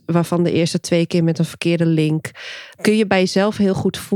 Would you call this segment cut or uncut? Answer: cut